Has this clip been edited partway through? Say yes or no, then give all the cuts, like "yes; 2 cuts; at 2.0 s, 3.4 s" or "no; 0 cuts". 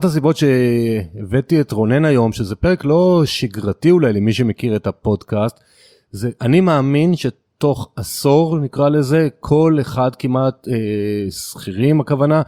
no; 0 cuts